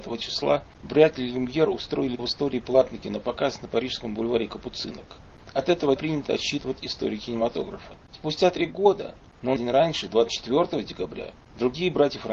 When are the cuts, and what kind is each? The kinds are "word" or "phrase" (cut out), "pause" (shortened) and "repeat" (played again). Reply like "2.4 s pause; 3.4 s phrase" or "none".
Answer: 2.2 s word; 6.0 s word; 9.6 s word